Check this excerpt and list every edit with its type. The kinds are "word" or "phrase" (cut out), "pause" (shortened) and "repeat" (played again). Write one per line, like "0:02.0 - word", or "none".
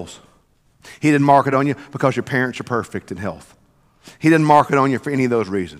none